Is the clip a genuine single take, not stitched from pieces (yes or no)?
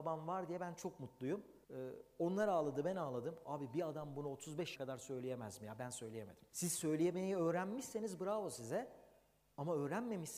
no